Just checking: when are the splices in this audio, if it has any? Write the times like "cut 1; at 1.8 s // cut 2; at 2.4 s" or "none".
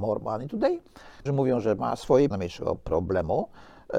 cut 1; at 1.3 s // cut 2; at 1.8 s // cut 3; at 2.3 s